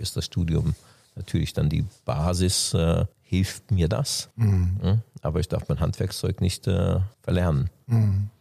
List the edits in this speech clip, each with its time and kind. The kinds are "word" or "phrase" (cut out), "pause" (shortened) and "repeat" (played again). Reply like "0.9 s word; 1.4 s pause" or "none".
3.1 s pause; 4.3 s pause; 7.1 s pause